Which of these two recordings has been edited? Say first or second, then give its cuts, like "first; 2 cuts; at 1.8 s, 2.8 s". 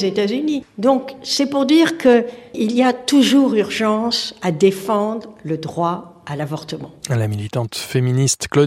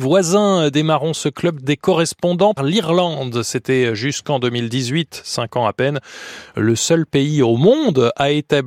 second; 1 cut; at 2.6 s